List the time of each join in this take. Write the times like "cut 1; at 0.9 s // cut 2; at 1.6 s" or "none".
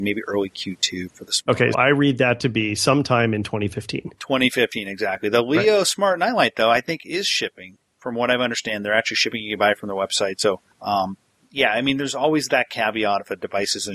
cut 1; at 1.7 s // cut 2; at 10.7 s